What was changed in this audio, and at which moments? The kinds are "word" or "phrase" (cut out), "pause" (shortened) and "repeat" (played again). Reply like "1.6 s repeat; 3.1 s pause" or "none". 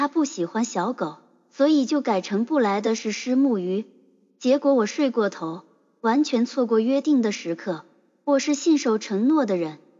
none